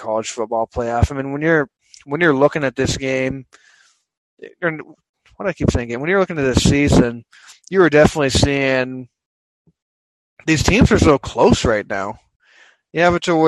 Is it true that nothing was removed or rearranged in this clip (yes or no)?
yes